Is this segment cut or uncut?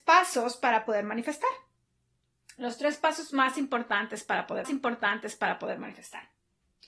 cut